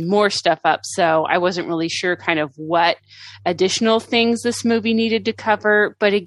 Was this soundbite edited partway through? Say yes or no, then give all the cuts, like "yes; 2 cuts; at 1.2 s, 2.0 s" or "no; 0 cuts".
no; 0 cuts